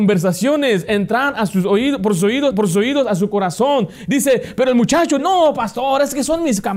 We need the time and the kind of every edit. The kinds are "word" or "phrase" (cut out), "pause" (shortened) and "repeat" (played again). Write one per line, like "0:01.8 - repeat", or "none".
0:02.5 - repeat
0:05.2 - word

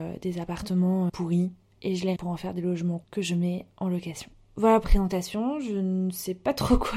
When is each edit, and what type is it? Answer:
0:01.1 - word
0:02.2 - word
0:03.0 - word
0:04.8 - word

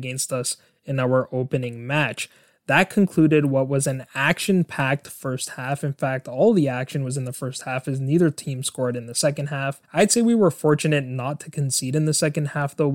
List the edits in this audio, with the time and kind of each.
0:09.8 - pause

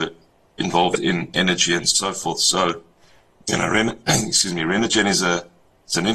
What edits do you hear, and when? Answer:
none

